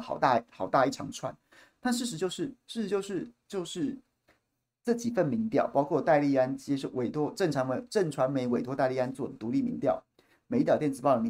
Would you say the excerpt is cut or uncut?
uncut